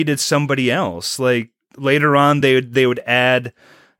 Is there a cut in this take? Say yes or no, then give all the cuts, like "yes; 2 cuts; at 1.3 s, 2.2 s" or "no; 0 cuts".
no; 0 cuts